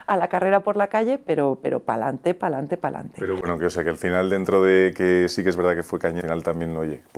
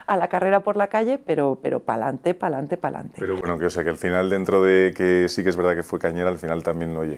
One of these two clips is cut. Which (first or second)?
first